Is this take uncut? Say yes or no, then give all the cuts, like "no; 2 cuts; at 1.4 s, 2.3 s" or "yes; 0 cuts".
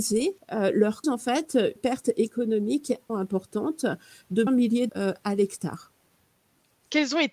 no; 5 cuts; at 1.0 s, 1.8 s, 3.1 s, 4.5 s, 4.9 s